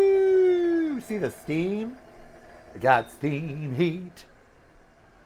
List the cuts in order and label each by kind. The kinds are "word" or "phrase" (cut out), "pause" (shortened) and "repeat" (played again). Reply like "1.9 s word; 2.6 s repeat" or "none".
none